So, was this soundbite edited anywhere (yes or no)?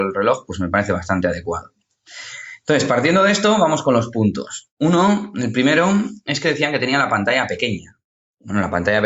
no